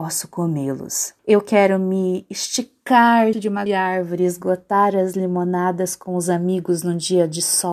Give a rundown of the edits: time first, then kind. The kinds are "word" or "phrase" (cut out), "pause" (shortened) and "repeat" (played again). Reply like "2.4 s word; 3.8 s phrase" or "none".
1.2 s pause; 3.3 s word; 3.7 s word